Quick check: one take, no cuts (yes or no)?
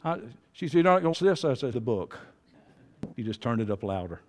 no